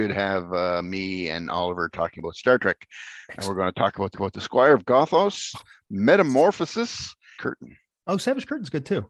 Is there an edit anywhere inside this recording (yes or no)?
yes